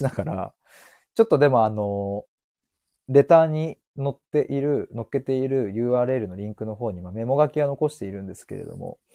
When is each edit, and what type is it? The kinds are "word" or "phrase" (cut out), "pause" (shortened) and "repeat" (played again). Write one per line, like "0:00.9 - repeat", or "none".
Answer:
none